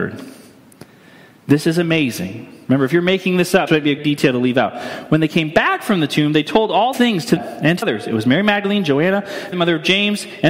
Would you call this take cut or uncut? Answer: cut